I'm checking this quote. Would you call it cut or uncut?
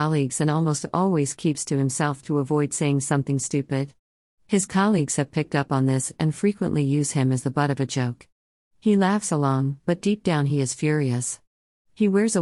uncut